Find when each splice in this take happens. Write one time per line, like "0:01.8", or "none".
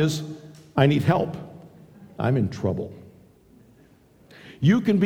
0:02.1